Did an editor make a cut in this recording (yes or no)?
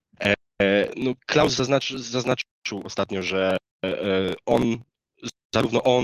no